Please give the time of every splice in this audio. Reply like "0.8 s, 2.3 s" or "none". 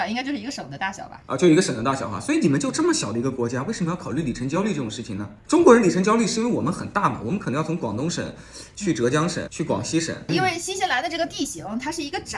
9.5 s